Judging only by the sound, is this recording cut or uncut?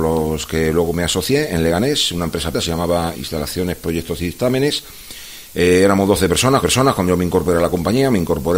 cut